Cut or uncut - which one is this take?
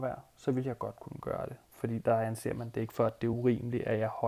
uncut